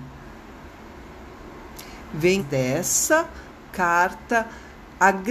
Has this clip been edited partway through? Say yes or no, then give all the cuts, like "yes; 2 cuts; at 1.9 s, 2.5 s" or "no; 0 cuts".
yes; 1 cut; at 2.4 s